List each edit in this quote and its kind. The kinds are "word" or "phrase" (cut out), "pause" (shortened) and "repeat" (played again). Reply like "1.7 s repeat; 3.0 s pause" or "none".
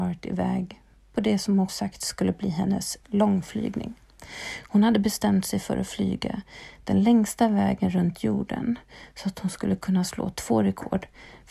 1.7 s word; 3.0 s word